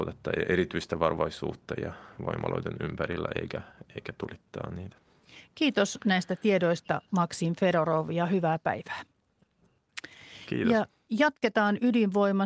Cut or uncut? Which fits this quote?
uncut